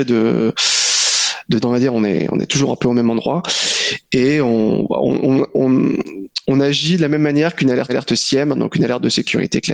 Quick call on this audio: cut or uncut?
cut